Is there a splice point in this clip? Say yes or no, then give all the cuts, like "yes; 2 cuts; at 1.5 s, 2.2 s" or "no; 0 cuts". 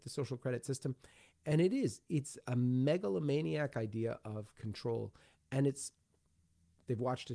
no; 0 cuts